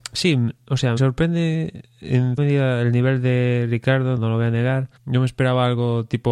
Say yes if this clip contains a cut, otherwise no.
yes